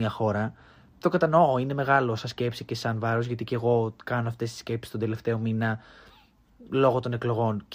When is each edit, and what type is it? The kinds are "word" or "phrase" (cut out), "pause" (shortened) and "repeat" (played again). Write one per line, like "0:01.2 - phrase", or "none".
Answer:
none